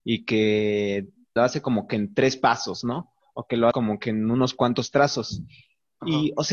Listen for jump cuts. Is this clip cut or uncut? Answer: cut